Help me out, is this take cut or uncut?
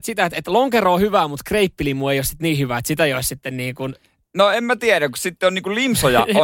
uncut